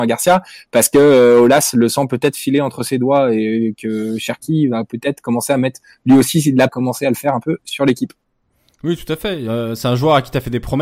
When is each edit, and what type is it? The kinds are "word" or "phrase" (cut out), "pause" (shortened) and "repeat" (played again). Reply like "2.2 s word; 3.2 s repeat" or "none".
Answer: 6.7 s phrase